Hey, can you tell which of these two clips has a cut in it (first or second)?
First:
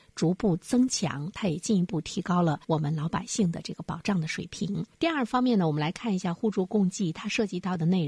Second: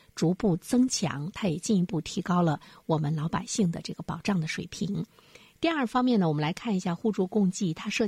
first